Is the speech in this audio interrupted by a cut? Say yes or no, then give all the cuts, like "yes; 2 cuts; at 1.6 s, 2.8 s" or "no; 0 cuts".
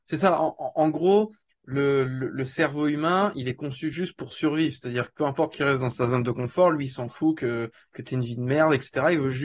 no; 0 cuts